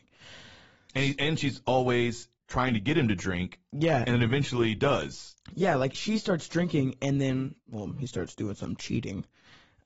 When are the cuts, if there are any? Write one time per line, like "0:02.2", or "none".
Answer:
0:02.4
0:05.9
0:07.6